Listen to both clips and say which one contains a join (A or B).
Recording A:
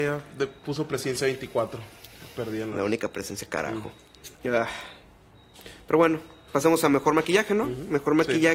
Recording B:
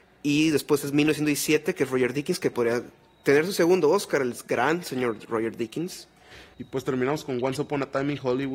A